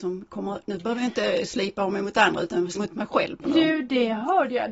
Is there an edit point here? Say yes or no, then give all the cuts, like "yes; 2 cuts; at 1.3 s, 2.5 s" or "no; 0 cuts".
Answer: yes; 2 cuts; at 2.7 s, 3.5 s